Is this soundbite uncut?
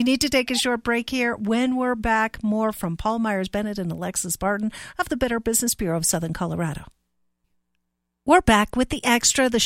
yes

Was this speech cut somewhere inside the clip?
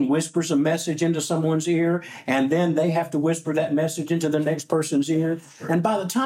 no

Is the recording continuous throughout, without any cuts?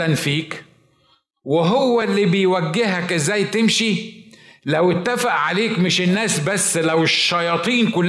yes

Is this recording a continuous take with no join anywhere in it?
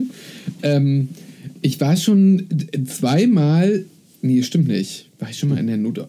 yes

